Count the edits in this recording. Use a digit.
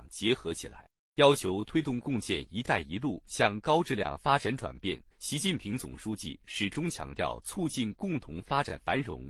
1